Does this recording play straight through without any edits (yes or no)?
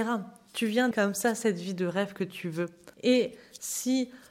no